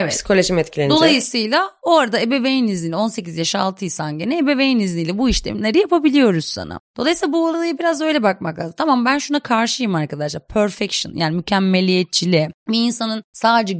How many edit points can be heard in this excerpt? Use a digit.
0